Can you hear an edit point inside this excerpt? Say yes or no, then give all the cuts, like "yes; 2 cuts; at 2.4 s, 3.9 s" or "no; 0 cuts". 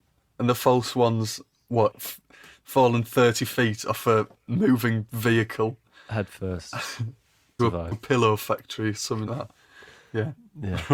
yes; 4 cuts; at 1.9 s, 7.6 s, 7.9 s, 9.3 s